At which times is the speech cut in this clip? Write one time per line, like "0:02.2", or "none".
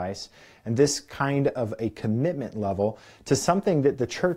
none